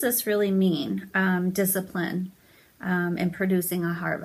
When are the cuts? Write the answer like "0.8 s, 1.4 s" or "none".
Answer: none